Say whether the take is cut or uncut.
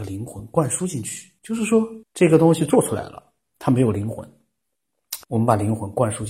cut